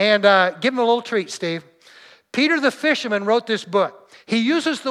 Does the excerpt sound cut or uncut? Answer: uncut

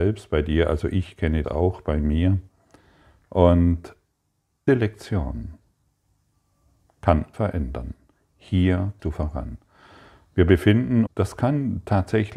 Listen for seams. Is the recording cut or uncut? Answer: cut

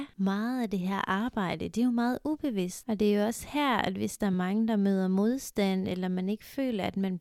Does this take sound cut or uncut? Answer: uncut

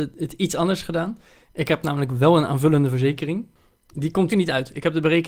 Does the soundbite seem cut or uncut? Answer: cut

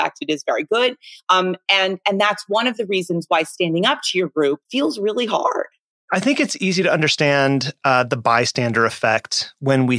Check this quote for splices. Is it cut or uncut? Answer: cut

